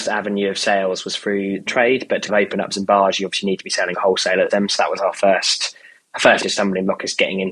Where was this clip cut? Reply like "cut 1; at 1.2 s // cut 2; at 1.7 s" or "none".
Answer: cut 1; at 1.7 s // cut 2; at 2.3 s // cut 3; at 2.7 s // cut 4; at 3.9 s // cut 5; at 4.5 s // cut 6; at 6.4 s